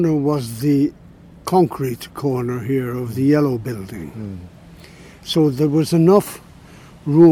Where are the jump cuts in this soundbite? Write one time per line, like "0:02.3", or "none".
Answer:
none